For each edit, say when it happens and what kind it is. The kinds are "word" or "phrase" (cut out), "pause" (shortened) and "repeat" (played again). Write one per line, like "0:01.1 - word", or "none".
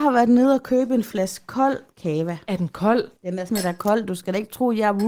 0:01.9 - pause
0:03.2 - pause
0:03.5 - word